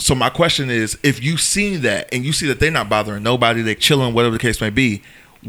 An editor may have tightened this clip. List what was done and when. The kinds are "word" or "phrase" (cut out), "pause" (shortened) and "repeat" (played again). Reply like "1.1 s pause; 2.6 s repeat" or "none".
3.8 s phrase